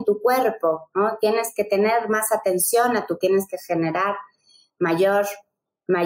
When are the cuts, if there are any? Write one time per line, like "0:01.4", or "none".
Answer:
0:03.2